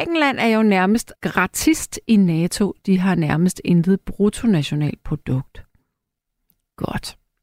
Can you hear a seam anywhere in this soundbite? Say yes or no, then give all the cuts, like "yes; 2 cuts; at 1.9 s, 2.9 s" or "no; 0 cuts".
yes; 1 cut; at 1.1 s